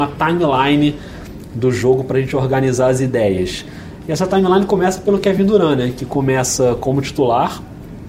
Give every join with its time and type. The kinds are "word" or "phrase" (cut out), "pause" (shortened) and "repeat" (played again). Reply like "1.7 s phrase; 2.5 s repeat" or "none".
none

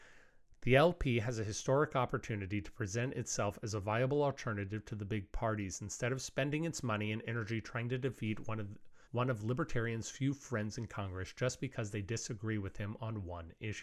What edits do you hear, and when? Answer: 9.0 s pause

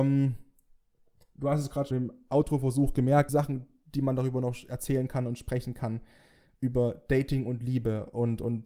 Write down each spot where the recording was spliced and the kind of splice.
1.9 s word; 3.3 s phrase

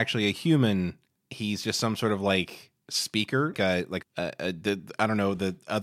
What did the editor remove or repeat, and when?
1.1 s pause; 3.5 s word; 4.0 s word

